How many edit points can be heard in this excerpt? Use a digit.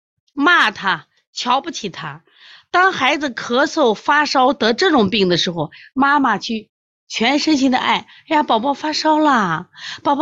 0